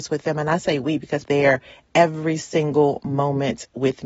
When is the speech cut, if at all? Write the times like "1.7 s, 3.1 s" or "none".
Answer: 1.2 s